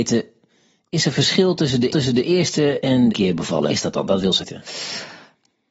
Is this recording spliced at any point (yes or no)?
yes